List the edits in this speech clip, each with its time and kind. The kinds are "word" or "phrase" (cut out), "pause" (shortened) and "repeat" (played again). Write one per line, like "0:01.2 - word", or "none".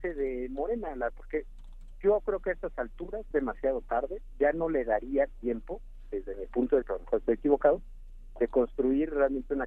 0:01.1 - word
0:03.3 - word
0:06.8 - word